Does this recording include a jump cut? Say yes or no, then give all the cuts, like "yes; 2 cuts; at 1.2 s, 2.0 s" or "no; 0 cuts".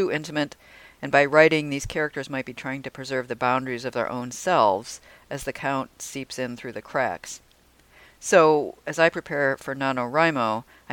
no; 0 cuts